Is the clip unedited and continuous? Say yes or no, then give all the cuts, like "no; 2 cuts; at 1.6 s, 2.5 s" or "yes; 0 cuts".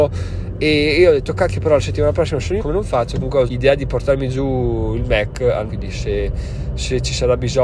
no; 3 cuts; at 2.6 s, 3.5 s, 5.7 s